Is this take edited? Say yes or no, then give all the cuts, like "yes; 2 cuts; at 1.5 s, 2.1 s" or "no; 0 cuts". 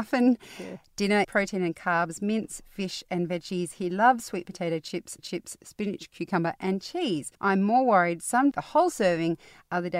yes; 4 cuts; at 1.2 s, 5.2 s, 7.3 s, 8.5 s